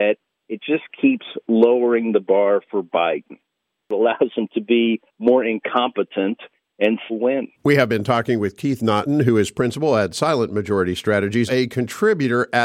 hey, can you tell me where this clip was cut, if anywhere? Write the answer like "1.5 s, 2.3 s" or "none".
5.1 s, 7.1 s, 7.5 s, 11.5 s